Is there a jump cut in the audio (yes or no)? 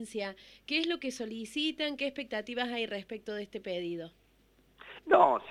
no